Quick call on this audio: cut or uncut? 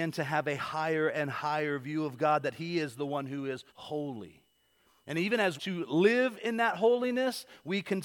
cut